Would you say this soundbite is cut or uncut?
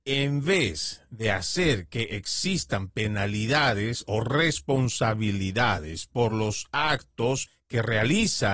uncut